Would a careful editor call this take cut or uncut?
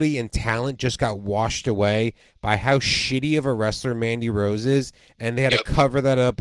uncut